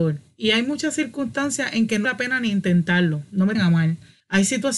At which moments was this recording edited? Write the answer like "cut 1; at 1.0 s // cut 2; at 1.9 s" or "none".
cut 1; at 2.0 s // cut 2; at 3.5 s